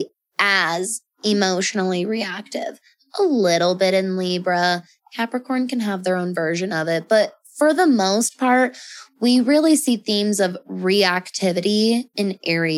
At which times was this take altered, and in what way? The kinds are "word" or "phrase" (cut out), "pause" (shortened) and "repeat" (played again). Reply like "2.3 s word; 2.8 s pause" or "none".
none